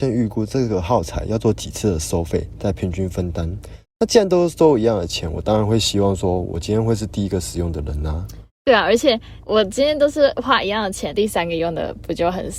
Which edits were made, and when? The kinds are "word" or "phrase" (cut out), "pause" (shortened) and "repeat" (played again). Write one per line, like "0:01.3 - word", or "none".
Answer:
0:11.1 - phrase